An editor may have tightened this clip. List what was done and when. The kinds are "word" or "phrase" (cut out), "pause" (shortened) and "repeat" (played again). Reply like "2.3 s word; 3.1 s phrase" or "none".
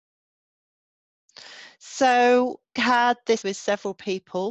2.8 s word; 3.4 s word